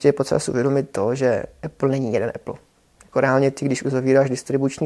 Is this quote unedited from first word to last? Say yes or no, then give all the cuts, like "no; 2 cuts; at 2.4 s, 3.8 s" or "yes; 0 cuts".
yes; 0 cuts